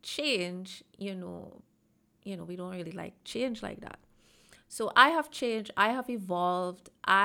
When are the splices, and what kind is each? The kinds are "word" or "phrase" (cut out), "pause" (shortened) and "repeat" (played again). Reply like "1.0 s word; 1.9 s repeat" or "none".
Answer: none